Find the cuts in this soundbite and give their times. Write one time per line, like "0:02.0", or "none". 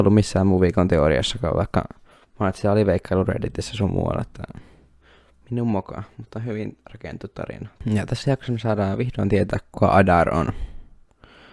none